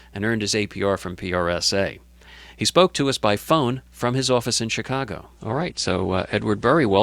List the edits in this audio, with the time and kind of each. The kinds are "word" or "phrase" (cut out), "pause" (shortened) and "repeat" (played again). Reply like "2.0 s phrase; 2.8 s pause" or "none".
5.4 s pause

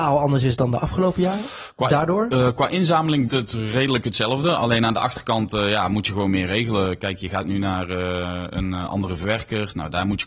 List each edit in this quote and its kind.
3.3 s word

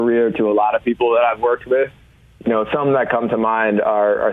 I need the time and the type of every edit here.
none

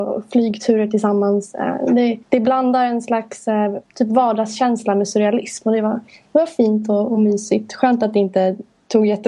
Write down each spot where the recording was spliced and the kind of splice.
2.2 s pause; 3.8 s pause; 6.1 s pause

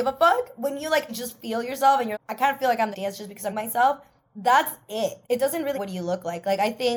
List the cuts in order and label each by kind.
1.1 s word; 2.1 s word; 2.9 s phrase; 3.5 s word; 5.2 s pause; 5.7 s word

